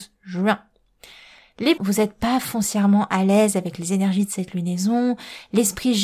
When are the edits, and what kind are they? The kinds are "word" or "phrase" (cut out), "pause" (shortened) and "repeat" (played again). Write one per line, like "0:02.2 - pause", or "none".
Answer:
0:01.8 - word